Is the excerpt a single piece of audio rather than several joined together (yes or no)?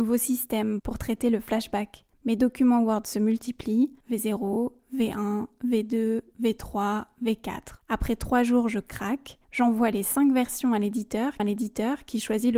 no